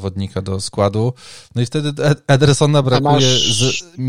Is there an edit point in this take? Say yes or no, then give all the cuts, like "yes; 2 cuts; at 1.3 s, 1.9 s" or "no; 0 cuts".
no; 0 cuts